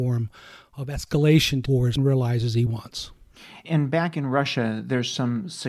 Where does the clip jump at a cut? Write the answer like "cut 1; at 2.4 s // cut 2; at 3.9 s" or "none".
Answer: cut 1; at 1.7 s // cut 2; at 2.0 s // cut 3; at 2.7 s